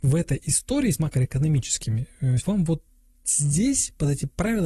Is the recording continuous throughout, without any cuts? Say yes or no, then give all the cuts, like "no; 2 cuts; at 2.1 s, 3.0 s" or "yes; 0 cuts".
no; 2 cuts; at 0.9 s, 2.4 s